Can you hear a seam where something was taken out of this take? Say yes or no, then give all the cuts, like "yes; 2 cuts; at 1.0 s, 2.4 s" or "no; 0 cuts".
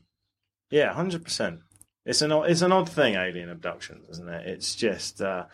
no; 0 cuts